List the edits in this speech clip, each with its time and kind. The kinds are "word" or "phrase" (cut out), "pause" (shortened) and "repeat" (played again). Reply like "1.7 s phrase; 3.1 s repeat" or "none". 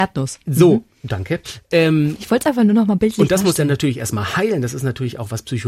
none